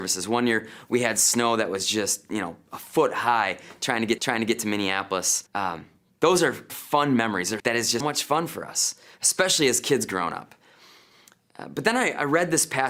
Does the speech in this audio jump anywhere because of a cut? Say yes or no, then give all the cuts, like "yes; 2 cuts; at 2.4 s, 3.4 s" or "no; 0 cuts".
yes; 5 cuts; at 4.2 s, 5.5 s, 6.7 s, 7.6 s, 8.0 s